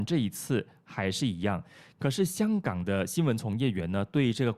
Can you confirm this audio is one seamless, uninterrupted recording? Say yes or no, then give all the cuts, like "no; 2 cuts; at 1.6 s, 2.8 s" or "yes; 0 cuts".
yes; 0 cuts